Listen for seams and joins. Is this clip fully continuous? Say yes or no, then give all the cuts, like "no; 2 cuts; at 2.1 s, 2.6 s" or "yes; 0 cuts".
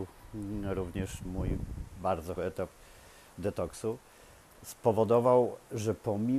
no; 3 cuts; at 1.2 s, 2.4 s, 4.4 s